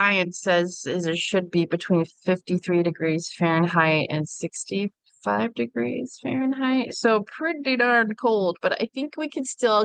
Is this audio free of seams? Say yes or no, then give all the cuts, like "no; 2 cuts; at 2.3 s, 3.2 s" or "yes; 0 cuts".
yes; 0 cuts